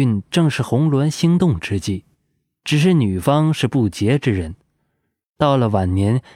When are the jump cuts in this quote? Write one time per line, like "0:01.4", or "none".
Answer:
none

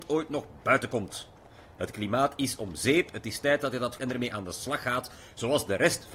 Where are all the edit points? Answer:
0:04.0

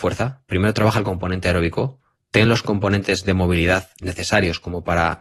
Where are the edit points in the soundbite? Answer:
none

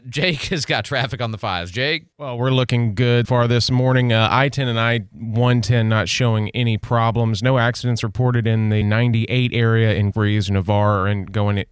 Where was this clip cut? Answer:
0:02.1
0:03.3
0:08.8
0:10.1

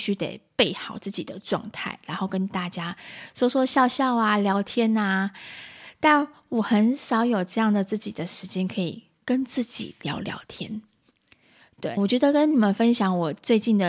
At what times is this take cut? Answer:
0:12.0

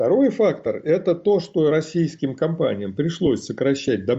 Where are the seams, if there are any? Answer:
none

